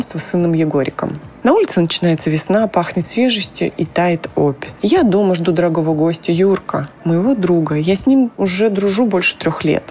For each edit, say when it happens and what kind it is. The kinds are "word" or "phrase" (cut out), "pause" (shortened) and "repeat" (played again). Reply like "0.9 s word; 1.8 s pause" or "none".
none